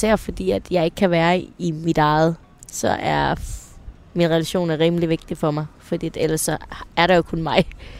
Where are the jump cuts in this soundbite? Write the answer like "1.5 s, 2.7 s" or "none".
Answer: none